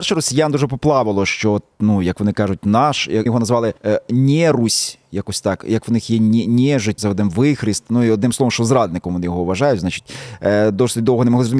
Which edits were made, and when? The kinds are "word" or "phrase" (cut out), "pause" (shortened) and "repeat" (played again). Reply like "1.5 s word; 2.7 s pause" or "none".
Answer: 3.3 s word; 3.8 s pause; 7.0 s word